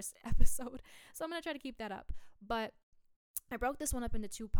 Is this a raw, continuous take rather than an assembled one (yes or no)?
yes